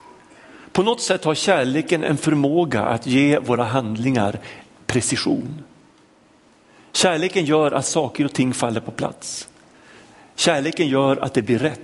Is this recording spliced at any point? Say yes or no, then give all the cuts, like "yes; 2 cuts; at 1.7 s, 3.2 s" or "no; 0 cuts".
no; 0 cuts